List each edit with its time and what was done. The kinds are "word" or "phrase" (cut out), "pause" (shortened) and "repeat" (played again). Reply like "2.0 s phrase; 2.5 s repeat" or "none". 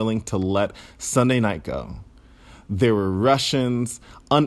none